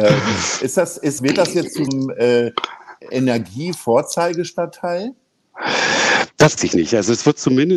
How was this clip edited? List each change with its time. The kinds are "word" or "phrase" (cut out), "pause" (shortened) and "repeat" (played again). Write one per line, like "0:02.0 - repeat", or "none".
0:01.2 - word
0:01.9 - word
0:03.1 - word
0:06.6 - word